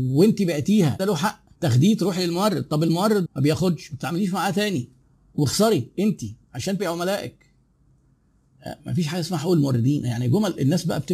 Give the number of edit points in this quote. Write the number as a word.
five